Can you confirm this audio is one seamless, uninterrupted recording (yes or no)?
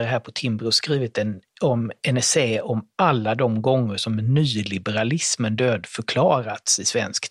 no